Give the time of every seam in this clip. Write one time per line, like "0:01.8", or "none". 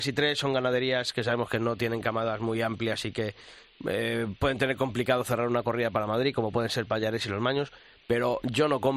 none

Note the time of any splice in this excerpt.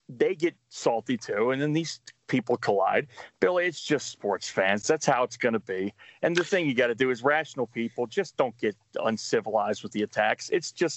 none

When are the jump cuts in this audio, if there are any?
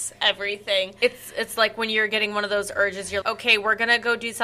0:03.2

